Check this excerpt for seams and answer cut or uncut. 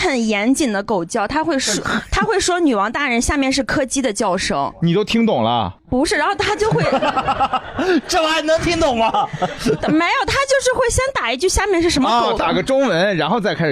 cut